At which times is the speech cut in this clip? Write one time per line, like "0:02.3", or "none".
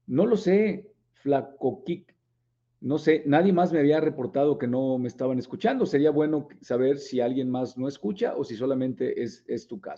none